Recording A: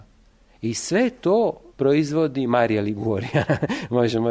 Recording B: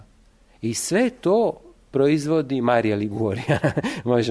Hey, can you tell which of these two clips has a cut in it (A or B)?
A